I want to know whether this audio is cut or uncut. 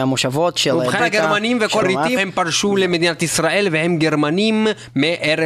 cut